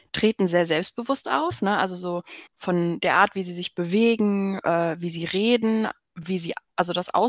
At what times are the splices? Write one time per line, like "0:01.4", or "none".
0:02.5